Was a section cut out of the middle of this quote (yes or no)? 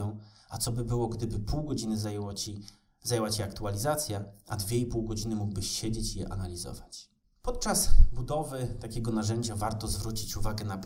no